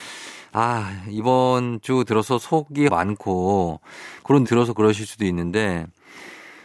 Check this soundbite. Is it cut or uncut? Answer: cut